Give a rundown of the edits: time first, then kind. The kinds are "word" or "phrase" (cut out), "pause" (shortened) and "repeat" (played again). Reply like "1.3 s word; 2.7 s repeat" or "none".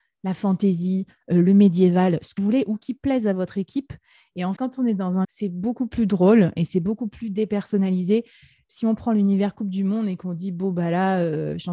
2.4 s word; 4.6 s word; 5.2 s word